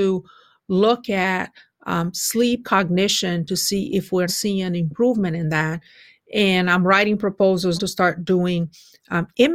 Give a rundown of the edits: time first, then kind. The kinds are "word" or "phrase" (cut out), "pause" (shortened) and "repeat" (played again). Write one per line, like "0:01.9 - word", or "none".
0:02.6 - word
0:04.3 - word
0:07.8 - word